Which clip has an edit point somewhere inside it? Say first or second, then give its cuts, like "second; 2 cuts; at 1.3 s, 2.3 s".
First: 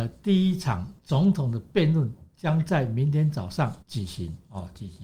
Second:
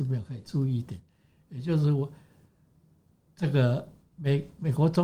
first; 3 cuts; at 1.0 s, 2.3 s, 3.8 s